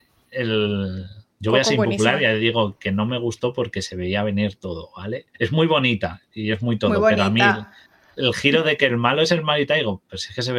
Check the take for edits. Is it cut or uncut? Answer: cut